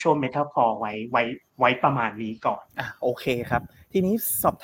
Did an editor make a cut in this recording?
yes; 2 cuts; at 1.5 s, 2.7 s

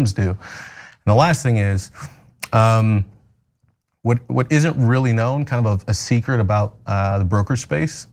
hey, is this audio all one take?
yes; 0 cuts

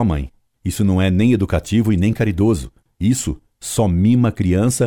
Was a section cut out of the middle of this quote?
no; 0 cuts

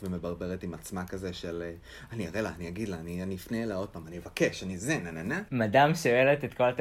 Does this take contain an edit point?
no; 0 cuts

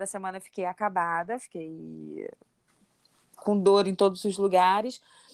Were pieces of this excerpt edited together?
no; 0 cuts

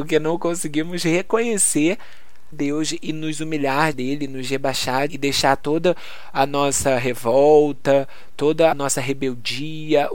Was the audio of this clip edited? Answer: yes; 4 cuts; at 2.5 s, 3.9 s, 5.1 s, 8.7 s

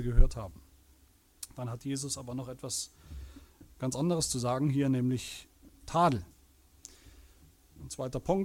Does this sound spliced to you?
no; 0 cuts

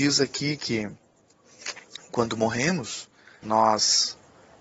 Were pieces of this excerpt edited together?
yes; 1 cut; at 3.4 s

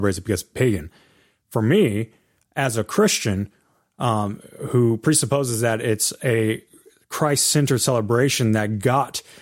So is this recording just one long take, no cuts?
yes; 0 cuts

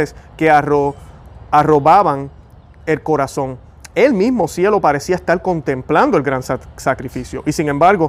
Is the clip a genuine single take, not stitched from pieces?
yes; 0 cuts

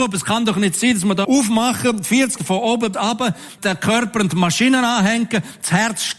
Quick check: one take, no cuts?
no; 4 cuts; at 1.2 s, 2.4 s, 2.9 s, 3.6 s

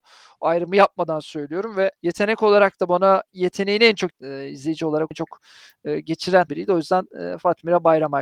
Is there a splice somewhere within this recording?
yes; 4 cuts; at 2.0 s, 4.1 s, 5.1 s, 6.5 s

